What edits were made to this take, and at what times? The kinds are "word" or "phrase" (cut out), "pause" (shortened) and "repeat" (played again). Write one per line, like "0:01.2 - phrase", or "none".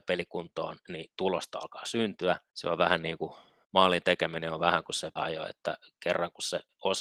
0:02.5 - pause
0:03.6 - pause
0:05.2 - word